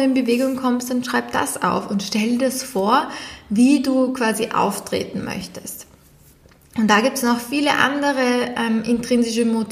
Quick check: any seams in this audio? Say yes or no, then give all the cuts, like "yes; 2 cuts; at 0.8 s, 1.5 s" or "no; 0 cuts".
no; 0 cuts